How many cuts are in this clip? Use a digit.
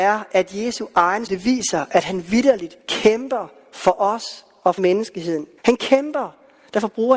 4